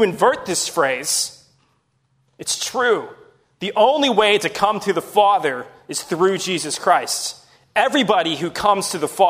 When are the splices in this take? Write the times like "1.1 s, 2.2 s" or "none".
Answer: none